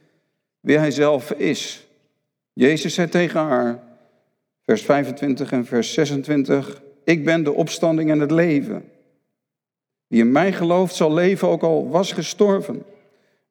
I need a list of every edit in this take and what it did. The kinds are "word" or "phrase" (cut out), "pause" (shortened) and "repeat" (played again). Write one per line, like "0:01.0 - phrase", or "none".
0:12.1 - word

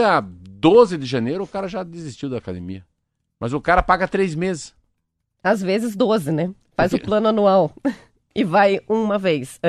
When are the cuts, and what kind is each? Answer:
none

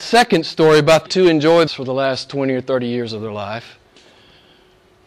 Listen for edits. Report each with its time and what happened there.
0:01.1 - phrase
0:01.7 - word

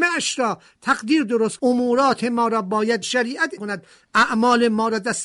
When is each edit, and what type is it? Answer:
0:01.6 - word
0:03.0 - word
0:03.6 - word

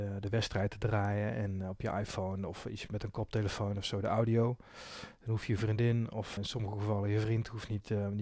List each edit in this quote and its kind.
0:02.9 - word
0:06.4 - word

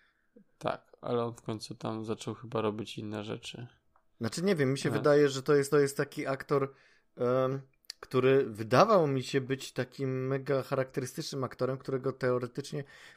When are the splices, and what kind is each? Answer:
0:05.7 - repeat

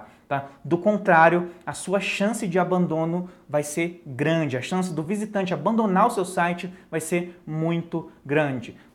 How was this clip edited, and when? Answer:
none

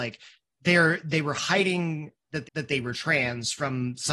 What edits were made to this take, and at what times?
0:02.4 - repeat

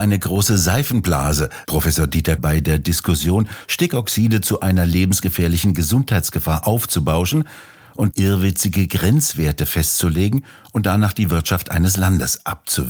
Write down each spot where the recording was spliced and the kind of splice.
0:01.6 - word
0:02.4 - word
0:08.1 - word

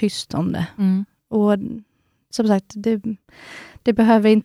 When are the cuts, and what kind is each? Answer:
none

